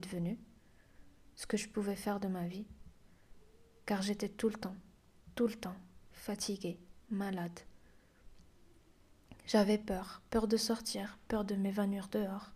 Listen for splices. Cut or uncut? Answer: uncut